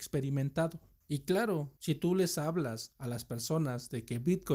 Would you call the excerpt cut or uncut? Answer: uncut